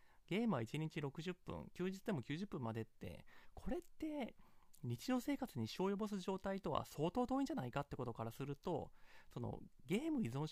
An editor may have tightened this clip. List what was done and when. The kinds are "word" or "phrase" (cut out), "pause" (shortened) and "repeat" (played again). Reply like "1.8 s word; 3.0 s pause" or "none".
none